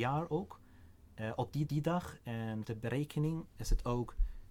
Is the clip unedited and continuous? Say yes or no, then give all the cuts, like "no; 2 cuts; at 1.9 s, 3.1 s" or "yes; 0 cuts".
no; 2 cuts; at 1.7 s, 2.6 s